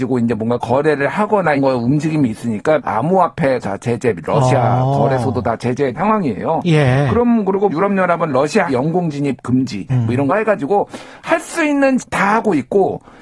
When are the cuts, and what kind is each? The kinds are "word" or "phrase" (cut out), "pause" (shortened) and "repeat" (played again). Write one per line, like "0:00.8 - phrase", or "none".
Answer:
0:01.6 - word
0:02.8 - word
0:03.6 - word
0:05.9 - word
0:07.7 - word
0:08.7 - word
0:09.9 - word
0:10.3 - word
0:12.0 - word